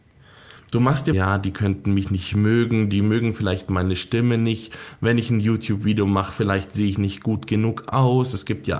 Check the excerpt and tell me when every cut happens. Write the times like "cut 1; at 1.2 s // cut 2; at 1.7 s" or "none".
cut 1; at 1.1 s